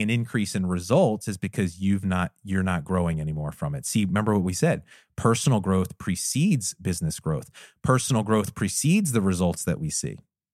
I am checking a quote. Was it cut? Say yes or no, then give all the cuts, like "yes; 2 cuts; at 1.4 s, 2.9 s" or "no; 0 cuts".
no; 0 cuts